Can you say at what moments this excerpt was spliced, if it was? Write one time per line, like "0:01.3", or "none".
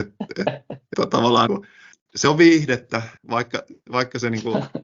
0:00.9
0:01.5
0:01.9
0:03.2

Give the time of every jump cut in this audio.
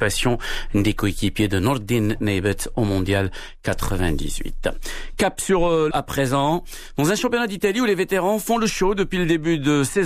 0:05.9

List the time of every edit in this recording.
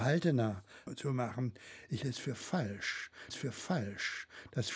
0:02.0
0:03.3

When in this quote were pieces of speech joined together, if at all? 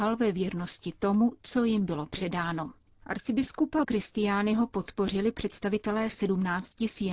0:03.8

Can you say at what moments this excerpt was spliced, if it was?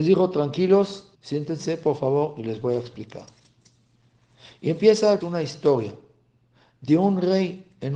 0:01.1
0:05.2

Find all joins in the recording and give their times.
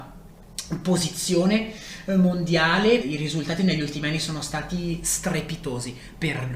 0:03.0

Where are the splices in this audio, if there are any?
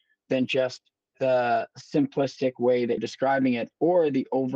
0:03.0

